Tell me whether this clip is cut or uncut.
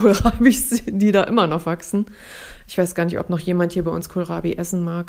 uncut